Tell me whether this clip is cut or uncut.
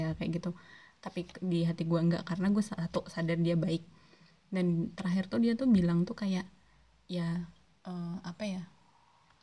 uncut